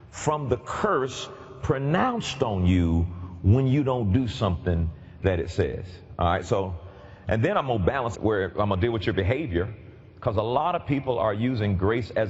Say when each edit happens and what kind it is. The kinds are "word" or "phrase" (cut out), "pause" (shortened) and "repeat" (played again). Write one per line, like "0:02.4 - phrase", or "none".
0:08.1 - phrase